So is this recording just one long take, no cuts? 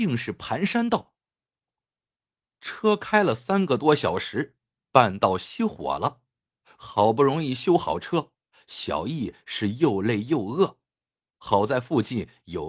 yes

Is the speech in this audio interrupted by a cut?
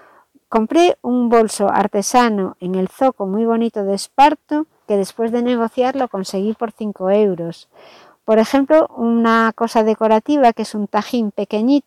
no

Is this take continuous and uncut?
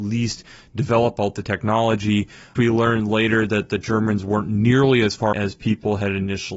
no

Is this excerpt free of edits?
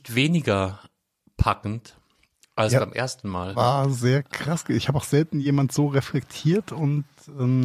yes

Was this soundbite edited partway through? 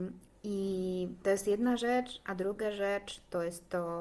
no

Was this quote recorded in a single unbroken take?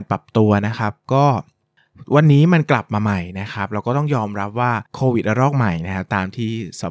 no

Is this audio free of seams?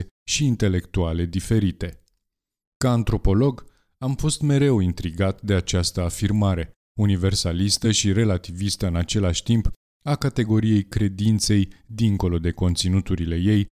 yes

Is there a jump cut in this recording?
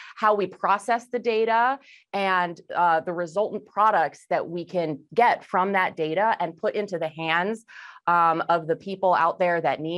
no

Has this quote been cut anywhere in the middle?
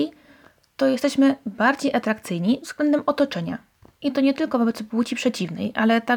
no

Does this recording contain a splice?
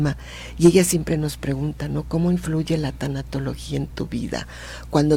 no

